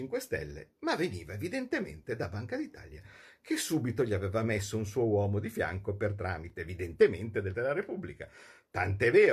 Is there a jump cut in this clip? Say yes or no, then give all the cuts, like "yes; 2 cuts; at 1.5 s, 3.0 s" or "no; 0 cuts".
yes; 1 cut; at 7.5 s